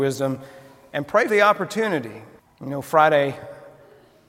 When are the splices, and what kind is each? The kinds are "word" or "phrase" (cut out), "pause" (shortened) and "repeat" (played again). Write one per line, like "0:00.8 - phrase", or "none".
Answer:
0:01.3 - word
0:02.4 - pause